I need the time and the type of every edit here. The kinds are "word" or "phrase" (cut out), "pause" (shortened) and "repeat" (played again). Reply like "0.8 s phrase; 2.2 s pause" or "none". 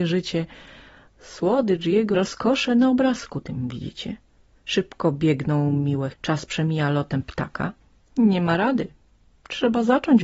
2.1 s word; 6.1 s word